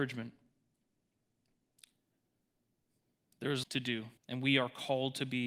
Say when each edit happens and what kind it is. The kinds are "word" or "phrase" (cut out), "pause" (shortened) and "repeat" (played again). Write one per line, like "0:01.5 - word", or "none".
0:03.6 - word
0:04.2 - pause